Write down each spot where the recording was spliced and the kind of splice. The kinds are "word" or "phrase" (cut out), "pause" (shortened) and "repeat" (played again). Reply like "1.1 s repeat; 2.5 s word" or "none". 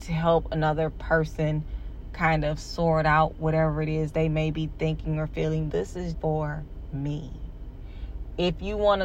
5.7 s word; 6.1 s word